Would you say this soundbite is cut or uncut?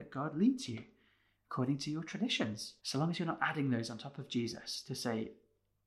cut